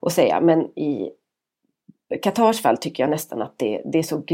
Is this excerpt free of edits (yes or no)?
yes